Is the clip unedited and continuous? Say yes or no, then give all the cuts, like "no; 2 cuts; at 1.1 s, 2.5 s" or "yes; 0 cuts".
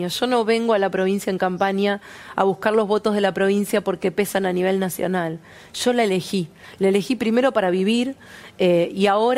yes; 0 cuts